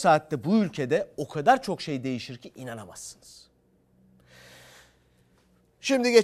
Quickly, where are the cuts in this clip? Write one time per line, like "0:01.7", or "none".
none